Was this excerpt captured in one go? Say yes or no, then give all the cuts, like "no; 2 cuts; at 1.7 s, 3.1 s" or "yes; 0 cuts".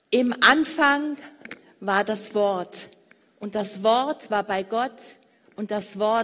yes; 0 cuts